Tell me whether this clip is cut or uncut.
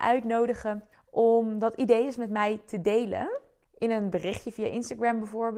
cut